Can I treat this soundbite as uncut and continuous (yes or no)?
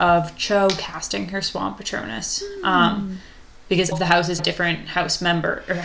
no